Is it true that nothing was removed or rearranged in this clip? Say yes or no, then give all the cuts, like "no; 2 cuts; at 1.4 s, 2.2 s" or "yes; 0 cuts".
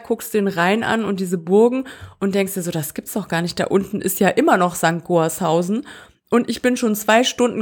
yes; 0 cuts